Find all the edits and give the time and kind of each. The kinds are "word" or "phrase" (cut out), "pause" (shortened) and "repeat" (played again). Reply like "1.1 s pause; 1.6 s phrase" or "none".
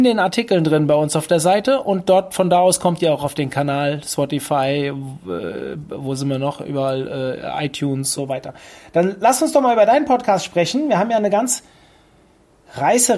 8.1 s phrase